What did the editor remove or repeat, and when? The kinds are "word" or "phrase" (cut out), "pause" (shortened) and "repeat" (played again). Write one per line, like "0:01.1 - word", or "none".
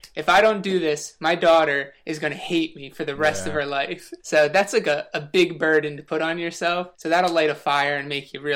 0:04.2 - pause
0:06.9 - pause